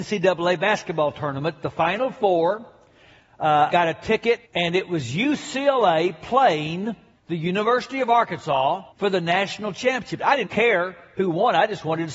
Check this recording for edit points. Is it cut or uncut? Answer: cut